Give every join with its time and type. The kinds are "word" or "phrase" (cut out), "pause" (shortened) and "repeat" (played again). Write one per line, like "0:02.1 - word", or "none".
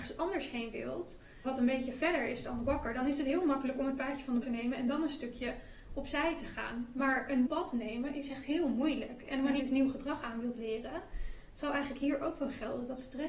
0:01.4 - word
0:04.4 - word
0:07.5 - word
0:09.6 - word